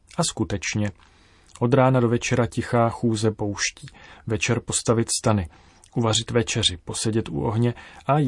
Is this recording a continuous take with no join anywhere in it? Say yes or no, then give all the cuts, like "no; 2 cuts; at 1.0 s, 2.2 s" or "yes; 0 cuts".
yes; 0 cuts